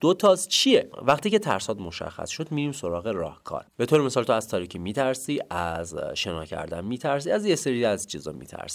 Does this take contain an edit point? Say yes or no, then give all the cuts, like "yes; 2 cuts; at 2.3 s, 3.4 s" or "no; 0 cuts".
no; 0 cuts